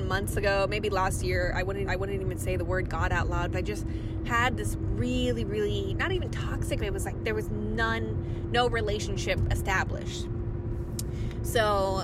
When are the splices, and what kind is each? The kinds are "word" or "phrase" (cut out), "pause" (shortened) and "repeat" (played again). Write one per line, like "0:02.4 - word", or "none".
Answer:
0:01.9 - repeat
0:03.5 - word
0:06.8 - word